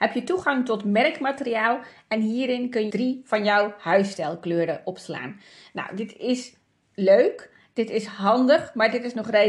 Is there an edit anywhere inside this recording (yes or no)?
yes